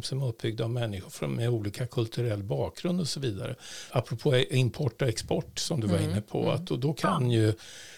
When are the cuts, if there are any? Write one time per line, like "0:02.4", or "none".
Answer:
0:03.9